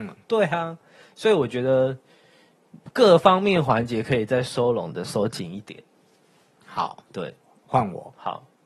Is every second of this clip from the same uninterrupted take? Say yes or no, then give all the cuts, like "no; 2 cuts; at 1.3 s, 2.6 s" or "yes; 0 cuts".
yes; 0 cuts